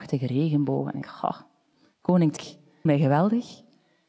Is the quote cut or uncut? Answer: cut